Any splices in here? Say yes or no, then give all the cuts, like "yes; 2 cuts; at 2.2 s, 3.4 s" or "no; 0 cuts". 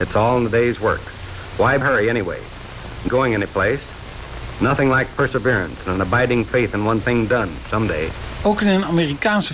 yes; 3 cuts; at 1.8 s, 3.1 s, 7.0 s